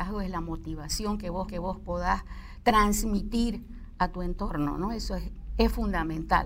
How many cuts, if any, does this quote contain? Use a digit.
1